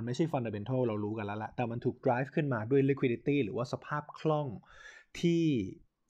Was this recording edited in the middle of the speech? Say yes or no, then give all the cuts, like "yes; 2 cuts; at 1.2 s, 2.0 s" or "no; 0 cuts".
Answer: no; 0 cuts